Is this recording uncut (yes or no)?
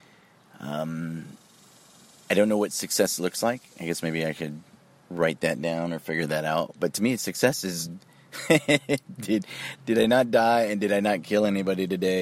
no